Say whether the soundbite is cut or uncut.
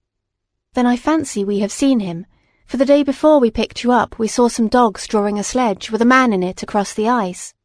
uncut